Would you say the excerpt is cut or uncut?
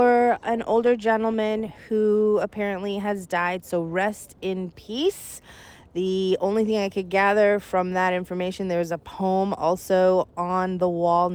uncut